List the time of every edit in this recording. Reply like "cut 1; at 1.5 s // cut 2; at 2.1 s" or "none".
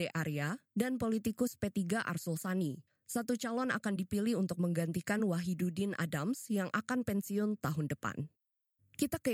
none